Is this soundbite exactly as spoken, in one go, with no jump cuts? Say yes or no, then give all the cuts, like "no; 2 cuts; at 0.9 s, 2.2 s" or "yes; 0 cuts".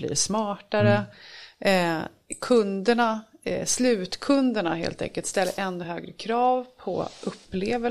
yes; 0 cuts